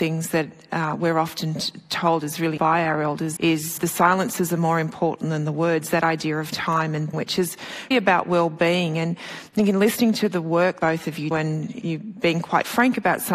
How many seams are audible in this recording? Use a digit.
9